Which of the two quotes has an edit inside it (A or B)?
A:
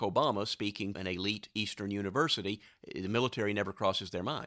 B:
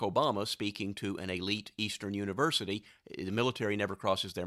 A